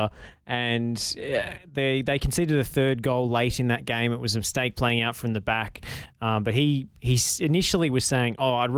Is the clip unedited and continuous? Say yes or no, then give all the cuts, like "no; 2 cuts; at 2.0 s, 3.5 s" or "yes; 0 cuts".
yes; 0 cuts